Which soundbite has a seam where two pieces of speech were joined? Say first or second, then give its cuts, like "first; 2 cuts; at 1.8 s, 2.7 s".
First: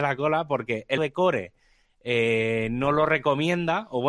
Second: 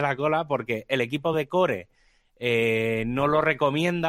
first; 1 cut; at 1.0 s